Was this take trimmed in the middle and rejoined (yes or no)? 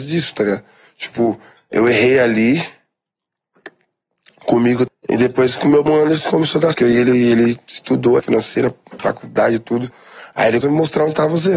yes